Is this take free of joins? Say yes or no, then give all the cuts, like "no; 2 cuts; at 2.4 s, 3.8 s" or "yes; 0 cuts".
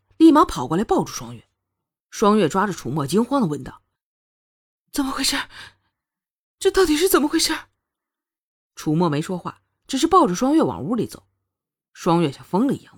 yes; 0 cuts